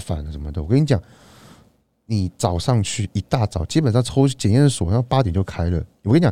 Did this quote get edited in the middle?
no; 0 cuts

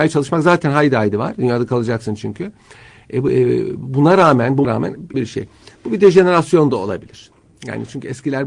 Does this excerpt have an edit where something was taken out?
yes; 2 cuts; at 4.6 s, 5.1 s

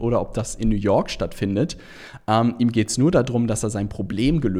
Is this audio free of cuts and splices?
yes; 0 cuts

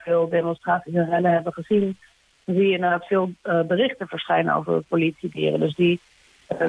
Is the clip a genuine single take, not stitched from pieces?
yes; 0 cuts

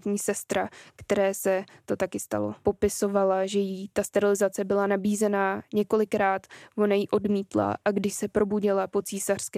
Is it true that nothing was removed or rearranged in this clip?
yes; 0 cuts

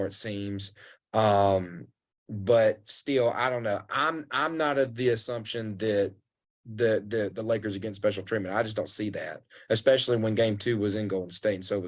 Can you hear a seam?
no; 0 cuts

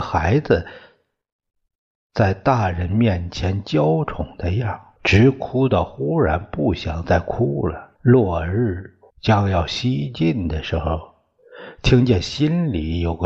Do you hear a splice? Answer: yes; 3 cuts; at 5.0 s, 8.0 s, 9.1 s

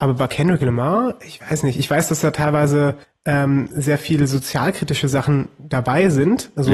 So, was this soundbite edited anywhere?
yes; 1 cut; at 3.0 s

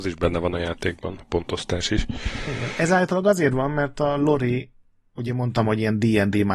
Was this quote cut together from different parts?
no; 0 cuts

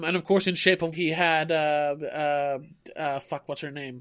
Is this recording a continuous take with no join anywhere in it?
no; 1 cut; at 0.9 s

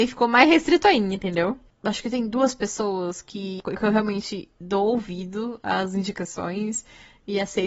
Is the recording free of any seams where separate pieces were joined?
yes; 0 cuts

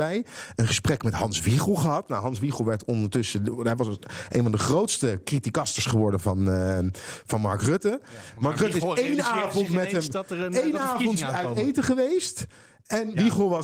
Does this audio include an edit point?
no; 0 cuts

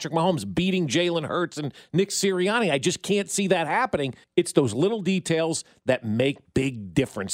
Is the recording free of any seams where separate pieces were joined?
no; 1 cut; at 4.2 s

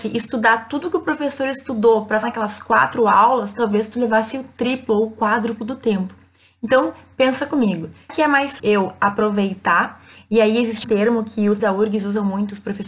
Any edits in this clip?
yes; 5 cuts; at 2.2 s, 8.1 s, 8.6 s, 10.8 s, 11.6 s

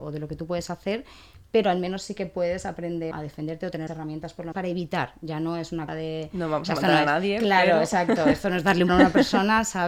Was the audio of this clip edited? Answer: yes; 5 cuts; at 3.1 s, 3.9 s, 4.5 s, 5.9 s, 8.9 s

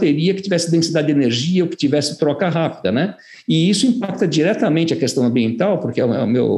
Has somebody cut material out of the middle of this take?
no; 0 cuts

